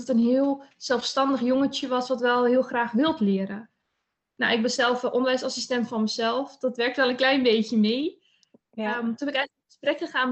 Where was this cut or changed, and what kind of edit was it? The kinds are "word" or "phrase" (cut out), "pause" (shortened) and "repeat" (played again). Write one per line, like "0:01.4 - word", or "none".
none